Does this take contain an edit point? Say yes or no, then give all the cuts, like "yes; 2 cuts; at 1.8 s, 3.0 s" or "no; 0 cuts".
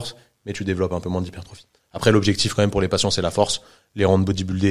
no; 0 cuts